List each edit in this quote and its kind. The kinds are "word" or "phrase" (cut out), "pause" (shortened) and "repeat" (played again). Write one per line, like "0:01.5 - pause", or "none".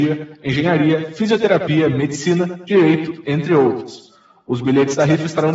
none